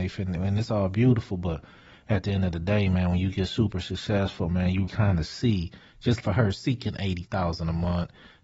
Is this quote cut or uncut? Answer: cut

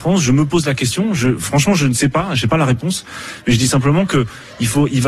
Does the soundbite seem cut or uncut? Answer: uncut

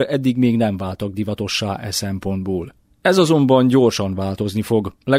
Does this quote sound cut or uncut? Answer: cut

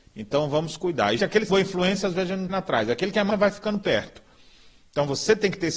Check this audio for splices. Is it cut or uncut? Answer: cut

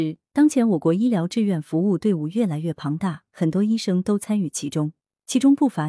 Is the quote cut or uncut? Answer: uncut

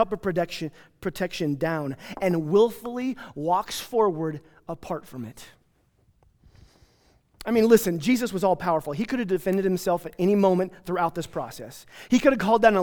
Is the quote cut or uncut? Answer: uncut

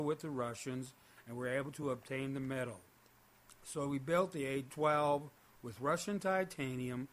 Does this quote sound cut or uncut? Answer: uncut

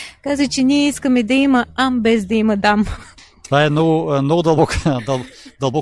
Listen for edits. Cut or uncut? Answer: uncut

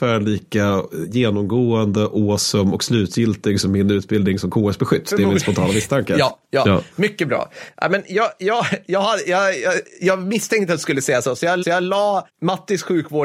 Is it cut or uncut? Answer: cut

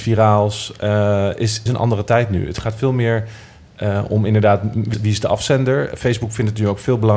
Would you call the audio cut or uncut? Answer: cut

